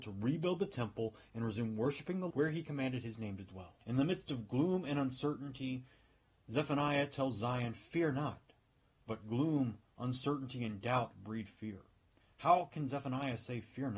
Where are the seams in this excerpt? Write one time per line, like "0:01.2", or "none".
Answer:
0:02.3
0:03.8